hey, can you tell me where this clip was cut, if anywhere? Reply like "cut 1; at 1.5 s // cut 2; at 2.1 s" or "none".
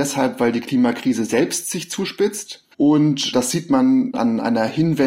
cut 1; at 2.7 s // cut 2; at 4.1 s